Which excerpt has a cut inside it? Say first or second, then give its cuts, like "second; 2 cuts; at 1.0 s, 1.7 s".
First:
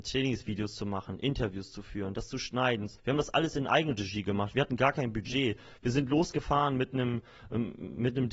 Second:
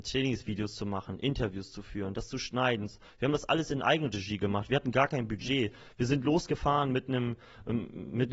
first; 1 cut; at 3.0 s